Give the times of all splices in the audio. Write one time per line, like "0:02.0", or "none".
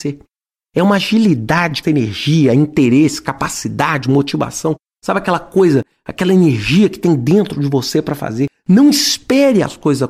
0:01.8